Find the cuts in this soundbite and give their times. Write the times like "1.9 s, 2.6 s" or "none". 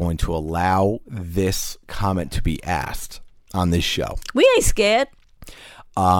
none

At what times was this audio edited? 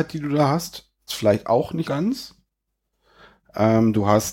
1.1 s, 1.8 s

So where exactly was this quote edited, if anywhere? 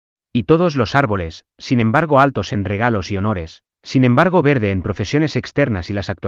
none

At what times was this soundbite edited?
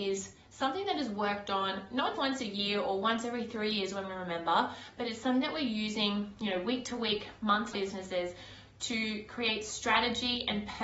2.2 s, 7.7 s

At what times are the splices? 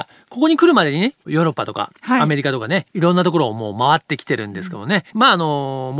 2.9 s, 5.1 s

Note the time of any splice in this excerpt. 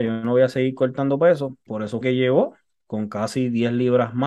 1.7 s, 2.0 s

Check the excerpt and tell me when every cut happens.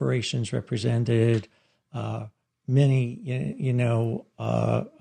none

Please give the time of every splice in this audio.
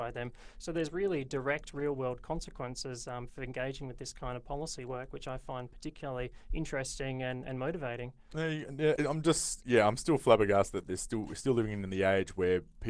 3.3 s, 9.0 s

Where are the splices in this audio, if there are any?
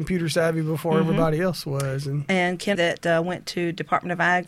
2.7 s

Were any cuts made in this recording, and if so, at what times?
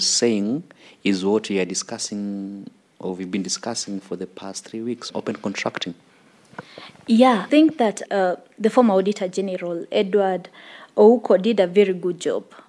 5.1 s, 7.5 s, 8.1 s

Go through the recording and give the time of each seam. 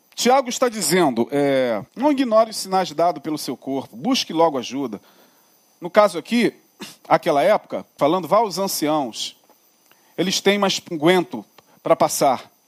1.9 s, 8.0 s, 10.9 s

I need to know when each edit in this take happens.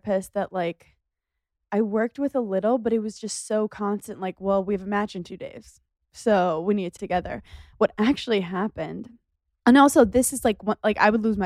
5.9 s, 7.0 s

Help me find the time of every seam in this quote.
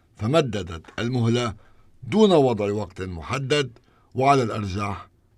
none

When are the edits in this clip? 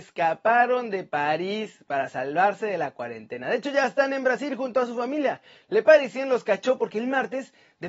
none

